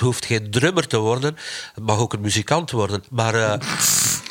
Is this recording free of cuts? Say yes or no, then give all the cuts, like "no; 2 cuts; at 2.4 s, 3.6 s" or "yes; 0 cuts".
yes; 0 cuts